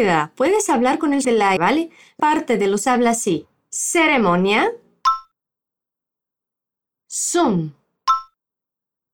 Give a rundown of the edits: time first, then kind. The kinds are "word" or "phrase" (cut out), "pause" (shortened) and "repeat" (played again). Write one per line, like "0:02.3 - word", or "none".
0:01.2 - word
0:01.6 - word
0:02.2 - word
0:02.8 - word